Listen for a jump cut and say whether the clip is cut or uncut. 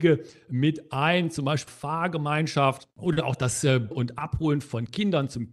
cut